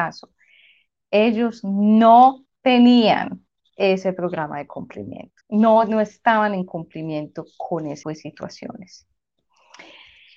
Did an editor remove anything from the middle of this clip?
yes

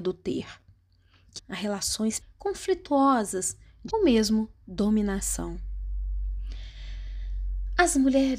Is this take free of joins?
no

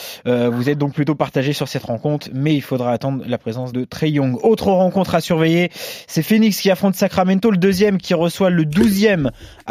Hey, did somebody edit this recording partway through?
yes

